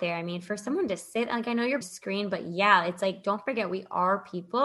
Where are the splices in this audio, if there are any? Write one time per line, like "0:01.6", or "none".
0:01.8

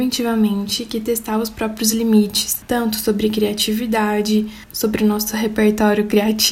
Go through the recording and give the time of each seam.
none

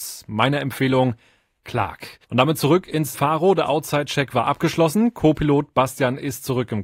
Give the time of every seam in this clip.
0:02.2
0:03.1

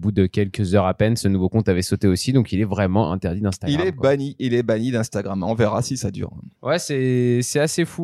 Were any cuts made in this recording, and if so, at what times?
0:06.6

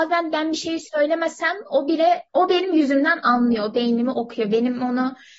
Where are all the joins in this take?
0:02.3

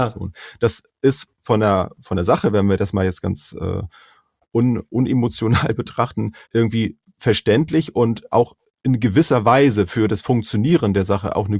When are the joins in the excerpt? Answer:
0:06.4

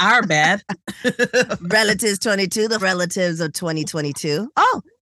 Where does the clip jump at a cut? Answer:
0:02.8

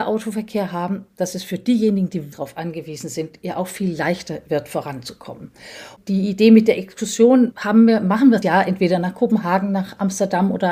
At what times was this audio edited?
0:02.3
0:07.5
0:08.4

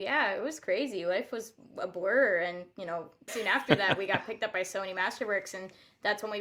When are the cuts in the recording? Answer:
0:03.3

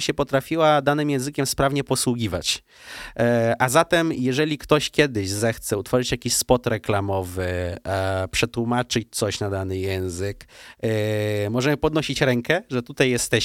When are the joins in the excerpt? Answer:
none

